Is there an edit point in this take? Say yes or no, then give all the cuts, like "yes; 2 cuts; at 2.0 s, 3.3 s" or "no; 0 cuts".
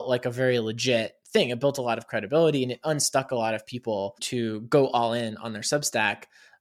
no; 0 cuts